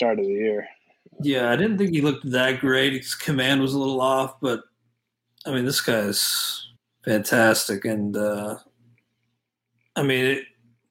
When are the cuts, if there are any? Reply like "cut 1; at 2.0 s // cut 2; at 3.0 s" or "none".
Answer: cut 1; at 6.8 s